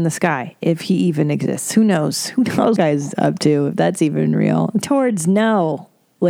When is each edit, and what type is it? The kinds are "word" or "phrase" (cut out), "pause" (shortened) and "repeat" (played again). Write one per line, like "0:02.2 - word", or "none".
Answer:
0:02.8 - phrase
0:04.8 - phrase